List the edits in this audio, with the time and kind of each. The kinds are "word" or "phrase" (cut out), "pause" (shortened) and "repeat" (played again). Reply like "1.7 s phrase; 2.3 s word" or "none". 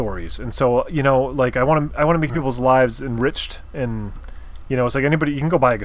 none